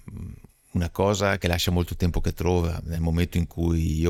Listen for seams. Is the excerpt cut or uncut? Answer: uncut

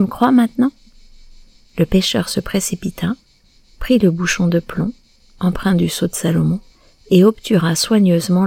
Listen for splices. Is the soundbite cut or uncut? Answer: uncut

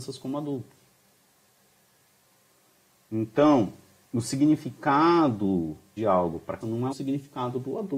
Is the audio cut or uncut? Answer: cut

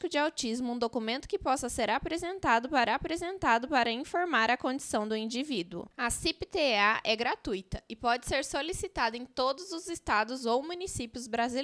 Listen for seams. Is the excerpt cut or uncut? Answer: cut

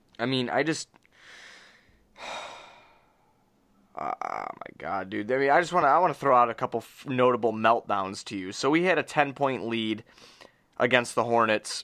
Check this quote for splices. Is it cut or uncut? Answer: uncut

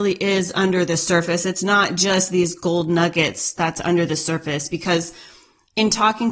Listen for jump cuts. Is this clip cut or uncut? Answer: uncut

